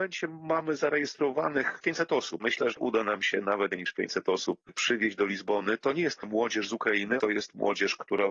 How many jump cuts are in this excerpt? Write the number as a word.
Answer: six